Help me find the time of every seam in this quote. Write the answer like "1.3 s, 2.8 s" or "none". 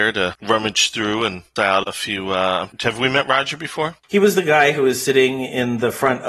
1.6 s, 2.7 s, 4.0 s